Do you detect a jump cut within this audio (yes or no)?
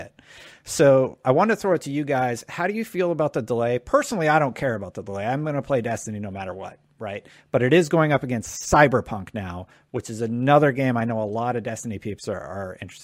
no